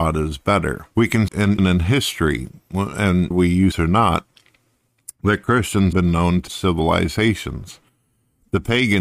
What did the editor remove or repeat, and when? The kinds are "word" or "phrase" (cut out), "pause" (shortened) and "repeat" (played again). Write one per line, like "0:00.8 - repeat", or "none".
0:00.9 - pause
0:01.3 - word
0:01.6 - word
0:03.3 - word
0:03.7 - word
0:05.9 - word
0:06.5 - word